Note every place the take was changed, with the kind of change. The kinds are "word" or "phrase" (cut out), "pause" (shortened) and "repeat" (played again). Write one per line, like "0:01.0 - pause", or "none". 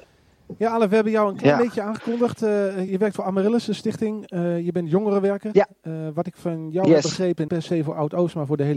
0:02.9 - phrase
0:07.5 - word